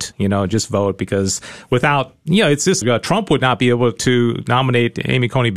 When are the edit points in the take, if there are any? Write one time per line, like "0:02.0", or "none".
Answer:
0:02.8

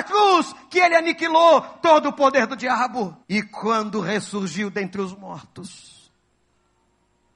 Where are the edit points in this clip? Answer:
0:03.2

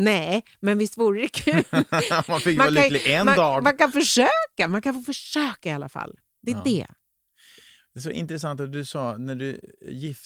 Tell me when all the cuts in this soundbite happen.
none

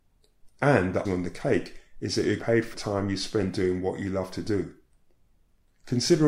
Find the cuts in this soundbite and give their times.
0:01.1
0:02.4
0:02.7

